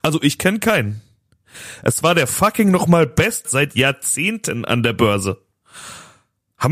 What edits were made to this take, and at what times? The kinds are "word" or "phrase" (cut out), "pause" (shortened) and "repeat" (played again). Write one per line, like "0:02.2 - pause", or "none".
0:03.5 - word